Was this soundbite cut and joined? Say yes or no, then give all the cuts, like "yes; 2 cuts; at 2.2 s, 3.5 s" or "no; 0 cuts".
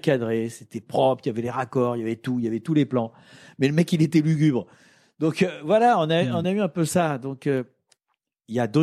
no; 0 cuts